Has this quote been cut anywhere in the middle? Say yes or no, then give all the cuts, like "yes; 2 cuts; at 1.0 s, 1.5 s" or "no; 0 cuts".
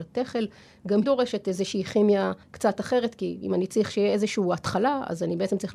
yes; 2 cuts; at 1.0 s, 2.4 s